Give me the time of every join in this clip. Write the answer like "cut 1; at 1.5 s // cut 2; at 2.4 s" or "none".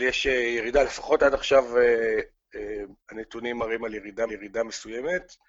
cut 1; at 3.0 s // cut 2; at 4.3 s